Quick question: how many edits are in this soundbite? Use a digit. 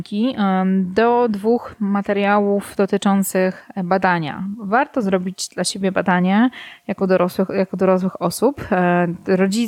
0